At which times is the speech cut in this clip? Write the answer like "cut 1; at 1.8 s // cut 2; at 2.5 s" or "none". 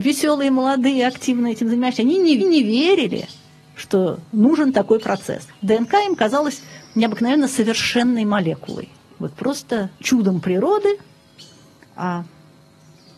cut 1; at 2.4 s // cut 2; at 10.0 s